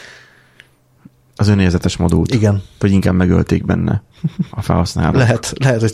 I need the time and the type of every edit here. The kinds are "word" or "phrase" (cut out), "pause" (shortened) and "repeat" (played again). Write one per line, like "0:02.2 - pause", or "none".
none